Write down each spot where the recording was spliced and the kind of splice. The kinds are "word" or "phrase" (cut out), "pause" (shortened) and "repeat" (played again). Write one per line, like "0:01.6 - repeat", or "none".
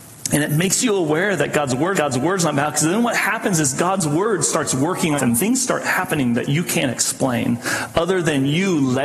0:01.9 - repeat
0:05.2 - phrase